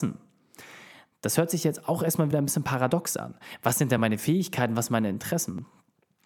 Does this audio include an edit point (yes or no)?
no